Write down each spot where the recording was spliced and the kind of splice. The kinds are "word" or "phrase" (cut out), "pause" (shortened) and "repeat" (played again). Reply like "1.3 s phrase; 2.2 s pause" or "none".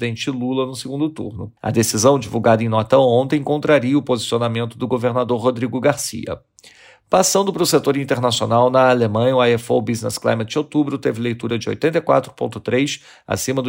1.6 s pause